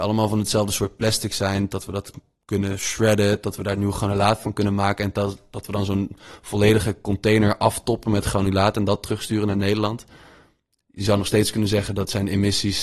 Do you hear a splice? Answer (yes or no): no